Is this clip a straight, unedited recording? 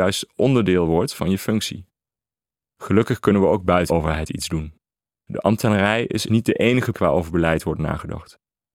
no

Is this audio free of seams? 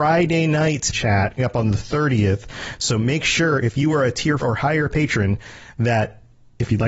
no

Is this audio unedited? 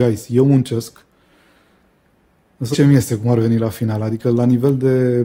no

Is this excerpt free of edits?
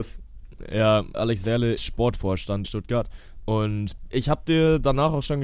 no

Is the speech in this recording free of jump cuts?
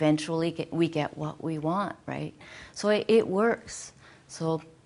yes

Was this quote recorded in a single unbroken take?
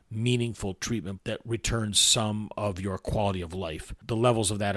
no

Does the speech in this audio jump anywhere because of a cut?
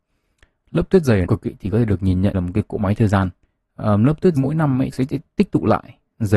yes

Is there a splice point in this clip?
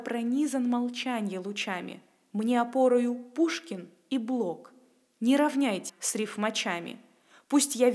yes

